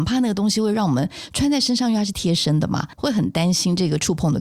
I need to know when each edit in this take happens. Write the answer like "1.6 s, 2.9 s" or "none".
2.9 s